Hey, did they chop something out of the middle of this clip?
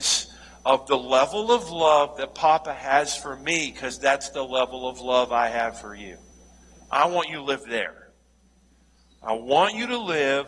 no; 0 cuts

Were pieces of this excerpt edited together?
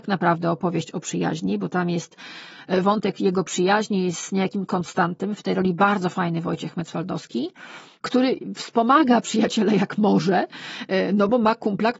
no; 0 cuts

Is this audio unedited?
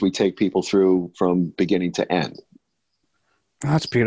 yes; 0 cuts

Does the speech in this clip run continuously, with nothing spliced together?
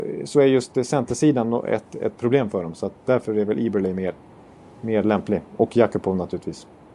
yes; 0 cuts

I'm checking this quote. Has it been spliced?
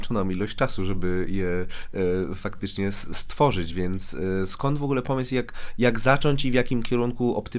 no; 0 cuts

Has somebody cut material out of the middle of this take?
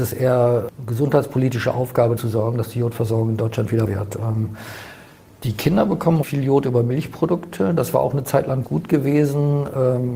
yes; 4 cuts; at 2.2 s, 3.9 s, 6.2 s, 8.6 s

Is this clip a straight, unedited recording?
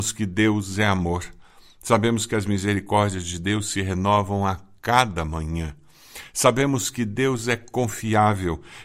yes; 0 cuts

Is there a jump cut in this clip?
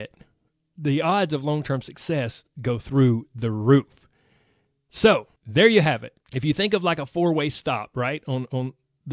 yes; 2 cuts; at 5.4 s, 6.2 s

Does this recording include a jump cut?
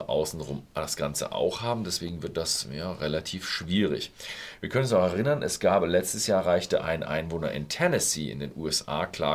no; 0 cuts

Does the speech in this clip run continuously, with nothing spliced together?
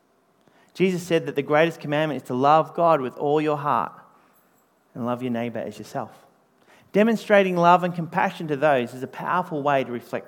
yes; 0 cuts

